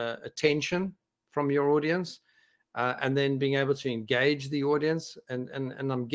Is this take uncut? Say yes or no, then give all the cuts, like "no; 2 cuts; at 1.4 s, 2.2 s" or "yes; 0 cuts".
yes; 0 cuts